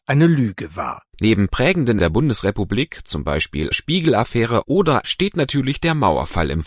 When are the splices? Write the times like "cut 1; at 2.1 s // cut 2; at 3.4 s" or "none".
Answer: cut 1; at 2.0 s // cut 2; at 3.7 s // cut 3; at 5.0 s